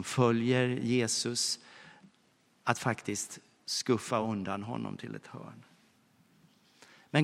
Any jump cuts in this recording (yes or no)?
no